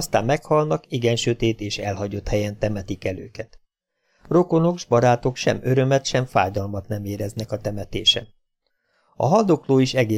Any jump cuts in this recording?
no; 0 cuts

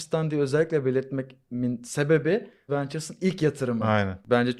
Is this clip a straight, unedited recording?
no; 1 cut; at 2.7 s

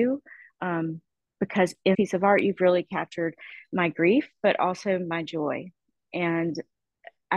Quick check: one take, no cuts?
no; 1 cut; at 1.9 s

